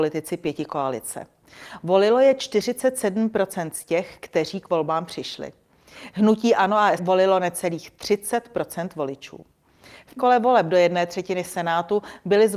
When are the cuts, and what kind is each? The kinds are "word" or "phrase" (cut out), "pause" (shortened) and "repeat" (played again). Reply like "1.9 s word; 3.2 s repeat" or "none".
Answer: 7.0 s word; 10.2 s word